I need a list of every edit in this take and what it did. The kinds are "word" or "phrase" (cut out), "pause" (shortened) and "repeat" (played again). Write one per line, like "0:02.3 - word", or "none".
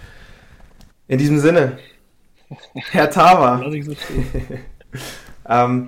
0:00.9 - pause

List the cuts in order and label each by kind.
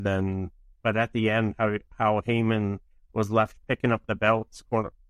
none

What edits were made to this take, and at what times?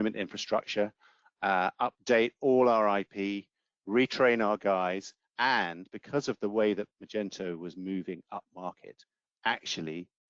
none

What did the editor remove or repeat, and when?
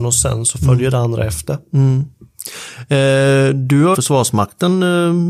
0:03.9 - phrase

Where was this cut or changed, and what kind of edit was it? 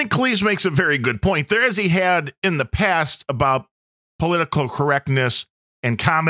none

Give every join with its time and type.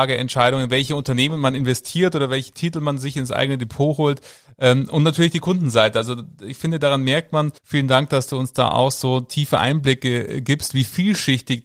0:07.6 - pause

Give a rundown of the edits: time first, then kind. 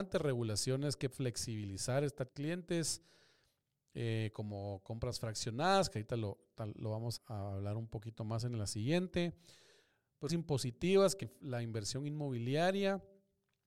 0:01.1 - word
0:02.3 - phrase
0:07.2 - word
0:10.3 - word
0:11.2 - phrase

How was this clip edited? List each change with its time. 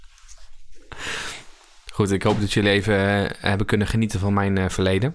none

